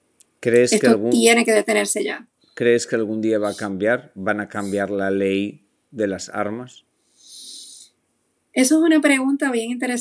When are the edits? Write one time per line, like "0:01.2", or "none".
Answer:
none

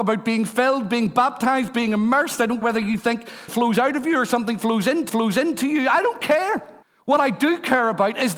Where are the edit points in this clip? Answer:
0:02.6
0:03.5
0:05.1
0:06.8

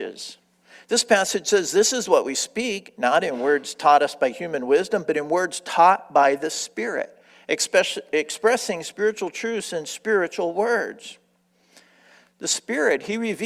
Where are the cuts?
none

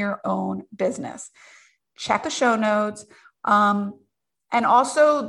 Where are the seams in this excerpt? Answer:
0:02.2

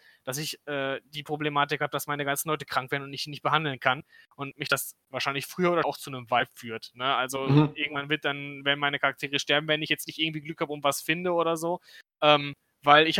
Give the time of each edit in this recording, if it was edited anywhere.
0:05.8

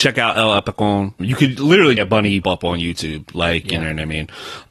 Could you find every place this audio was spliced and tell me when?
0:01.2
0:02.0
0:02.4

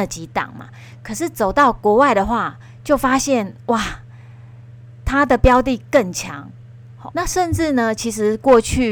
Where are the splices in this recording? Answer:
0:07.1

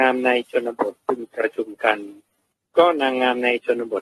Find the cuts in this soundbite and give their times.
0:02.5

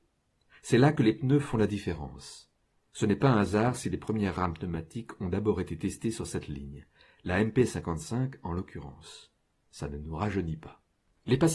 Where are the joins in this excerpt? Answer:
none

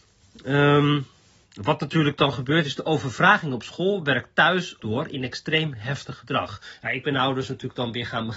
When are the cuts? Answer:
0:04.8

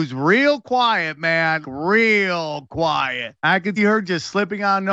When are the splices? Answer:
0:01.6
0:03.4
0:03.8

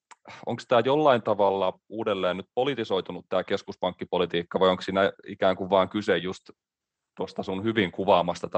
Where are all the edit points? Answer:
none

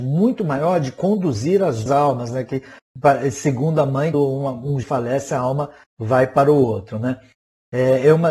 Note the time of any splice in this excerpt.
0:01.9
0:04.1
0:04.8

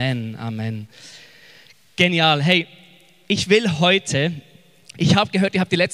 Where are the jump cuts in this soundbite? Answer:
none

